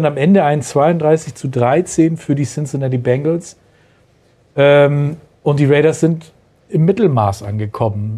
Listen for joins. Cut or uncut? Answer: uncut